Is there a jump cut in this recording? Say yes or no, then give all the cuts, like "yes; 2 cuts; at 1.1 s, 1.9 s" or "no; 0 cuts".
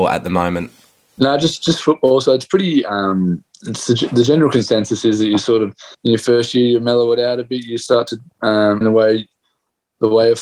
yes; 3 cuts; at 3.5 s, 5.9 s, 8.8 s